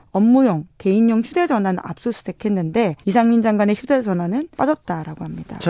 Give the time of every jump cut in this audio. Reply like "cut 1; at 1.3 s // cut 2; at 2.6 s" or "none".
cut 1; at 3.0 s // cut 2; at 4.5 s